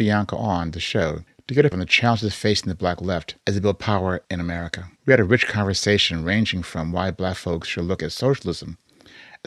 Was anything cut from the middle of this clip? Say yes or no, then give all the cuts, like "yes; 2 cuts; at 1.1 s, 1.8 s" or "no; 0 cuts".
yes; 5 cuts; at 1.3 s, 1.7 s, 3.4 s, 4.2 s, 5.0 s